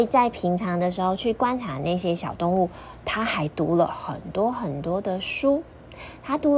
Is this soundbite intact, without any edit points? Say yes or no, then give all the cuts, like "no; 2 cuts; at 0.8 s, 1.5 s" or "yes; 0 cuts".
yes; 0 cuts